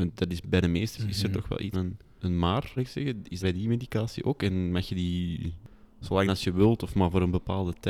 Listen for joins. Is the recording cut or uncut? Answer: cut